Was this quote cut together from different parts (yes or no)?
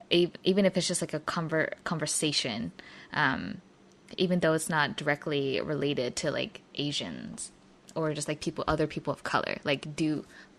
no